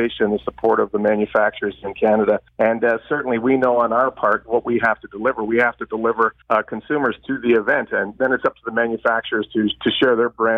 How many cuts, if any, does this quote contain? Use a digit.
2